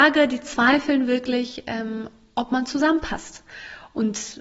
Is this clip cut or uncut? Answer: uncut